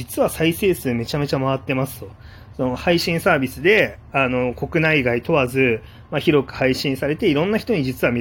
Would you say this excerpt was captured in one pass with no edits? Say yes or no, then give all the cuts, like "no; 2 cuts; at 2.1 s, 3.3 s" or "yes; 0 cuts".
yes; 0 cuts